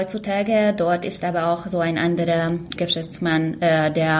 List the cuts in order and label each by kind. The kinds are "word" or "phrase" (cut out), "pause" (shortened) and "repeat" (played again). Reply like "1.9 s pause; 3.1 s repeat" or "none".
2.8 s word